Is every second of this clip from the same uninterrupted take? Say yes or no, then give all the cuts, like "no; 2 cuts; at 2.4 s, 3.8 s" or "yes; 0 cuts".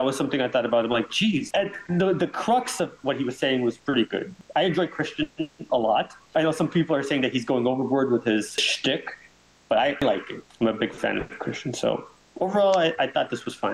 yes; 0 cuts